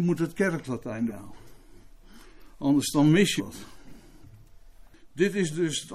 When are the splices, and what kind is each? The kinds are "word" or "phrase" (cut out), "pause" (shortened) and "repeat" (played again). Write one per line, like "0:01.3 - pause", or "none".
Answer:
0:01.1 - word
0:03.4 - word